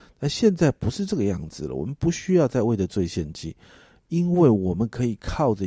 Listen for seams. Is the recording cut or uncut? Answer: uncut